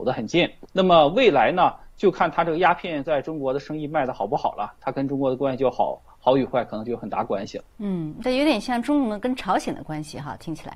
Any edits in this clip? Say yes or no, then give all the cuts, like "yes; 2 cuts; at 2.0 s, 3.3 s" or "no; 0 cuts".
yes; 1 cut; at 7.7 s